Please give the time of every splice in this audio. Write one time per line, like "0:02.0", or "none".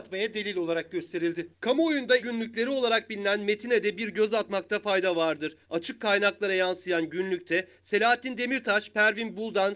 0:02.2
0:05.6